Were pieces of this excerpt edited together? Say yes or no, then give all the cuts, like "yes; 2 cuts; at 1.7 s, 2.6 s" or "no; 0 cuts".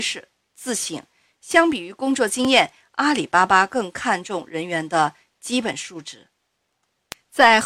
no; 0 cuts